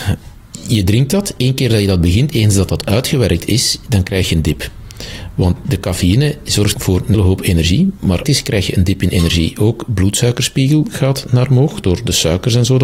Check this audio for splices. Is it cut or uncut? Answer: cut